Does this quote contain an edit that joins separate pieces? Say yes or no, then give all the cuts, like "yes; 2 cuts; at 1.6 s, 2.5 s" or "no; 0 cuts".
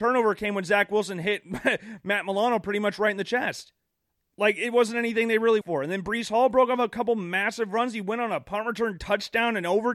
yes; 2 cuts; at 3.9 s, 5.6 s